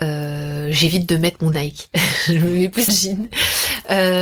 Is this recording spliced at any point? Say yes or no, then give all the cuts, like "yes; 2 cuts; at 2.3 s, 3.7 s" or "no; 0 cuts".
yes; 2 cuts; at 1.5 s, 2.9 s